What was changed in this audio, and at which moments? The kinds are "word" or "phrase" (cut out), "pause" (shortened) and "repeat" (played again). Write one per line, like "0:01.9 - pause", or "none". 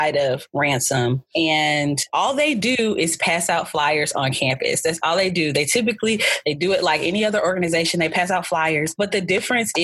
none